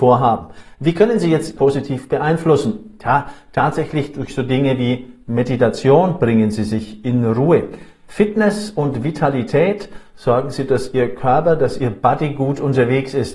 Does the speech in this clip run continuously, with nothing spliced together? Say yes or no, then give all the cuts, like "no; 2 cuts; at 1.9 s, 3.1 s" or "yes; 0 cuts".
no; 2 cuts; at 1.6 s, 10.7 s